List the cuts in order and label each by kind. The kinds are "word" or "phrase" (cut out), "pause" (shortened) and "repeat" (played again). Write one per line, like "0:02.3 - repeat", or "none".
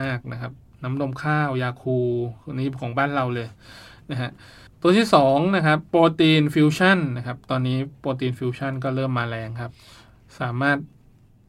0:04.7 - pause
0:05.9 - pause